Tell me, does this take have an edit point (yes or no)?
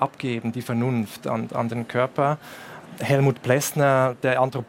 no